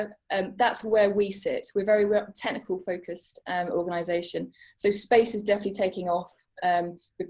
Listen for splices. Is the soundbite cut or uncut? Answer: uncut